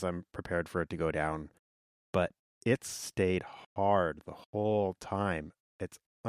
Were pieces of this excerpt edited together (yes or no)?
no